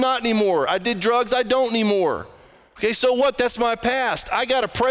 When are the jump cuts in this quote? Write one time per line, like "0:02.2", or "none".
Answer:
none